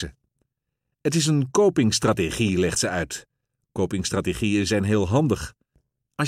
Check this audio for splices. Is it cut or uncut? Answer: uncut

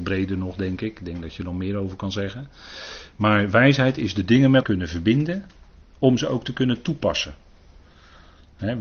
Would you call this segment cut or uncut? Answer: cut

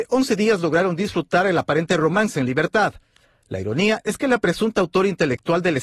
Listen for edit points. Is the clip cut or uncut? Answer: uncut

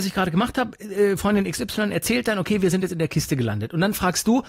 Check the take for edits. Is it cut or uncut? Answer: uncut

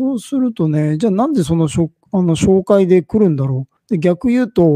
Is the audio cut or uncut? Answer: cut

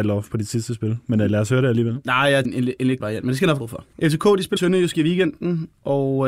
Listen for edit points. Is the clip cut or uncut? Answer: cut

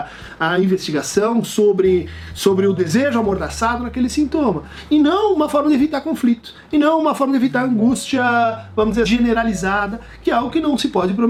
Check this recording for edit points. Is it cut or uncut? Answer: cut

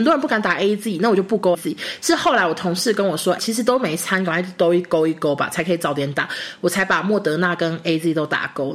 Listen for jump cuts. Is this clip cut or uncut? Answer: cut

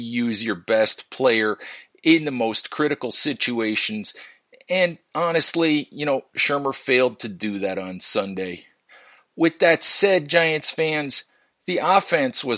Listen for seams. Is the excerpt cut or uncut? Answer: uncut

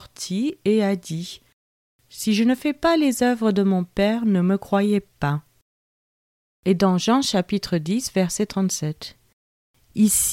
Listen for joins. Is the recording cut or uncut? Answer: uncut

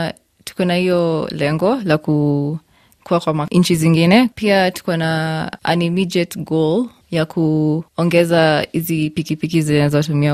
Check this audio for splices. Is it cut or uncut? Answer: uncut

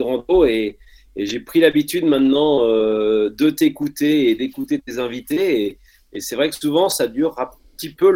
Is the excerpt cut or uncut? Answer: uncut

